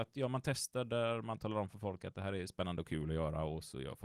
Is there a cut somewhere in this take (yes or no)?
no